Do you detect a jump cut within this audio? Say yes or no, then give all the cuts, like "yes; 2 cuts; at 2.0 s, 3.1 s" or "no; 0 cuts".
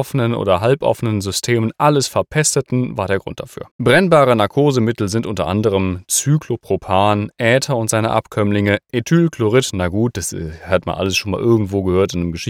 yes; 1 cut; at 3.7 s